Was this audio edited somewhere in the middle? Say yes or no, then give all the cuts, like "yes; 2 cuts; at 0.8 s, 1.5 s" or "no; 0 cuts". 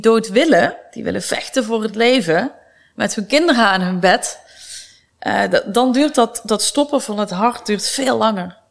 no; 0 cuts